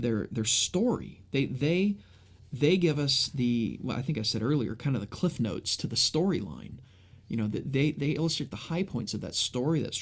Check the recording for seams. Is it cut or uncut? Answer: uncut